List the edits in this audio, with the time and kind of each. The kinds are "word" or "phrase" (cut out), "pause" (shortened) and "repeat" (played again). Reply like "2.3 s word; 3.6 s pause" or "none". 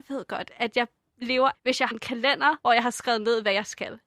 1.5 s word; 1.9 s word; 2.6 s pause